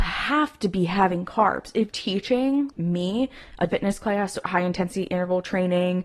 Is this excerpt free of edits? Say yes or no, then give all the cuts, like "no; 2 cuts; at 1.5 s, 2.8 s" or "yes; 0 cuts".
no; 4 cuts; at 1.9 s, 2.7 s, 3.7 s, 4.4 s